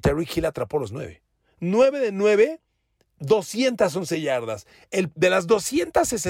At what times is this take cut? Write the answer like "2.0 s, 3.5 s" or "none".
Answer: none